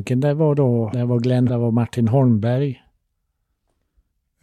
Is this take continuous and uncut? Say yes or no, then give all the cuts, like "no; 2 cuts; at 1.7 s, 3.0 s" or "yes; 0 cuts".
no; 2 cuts; at 0.9 s, 1.5 s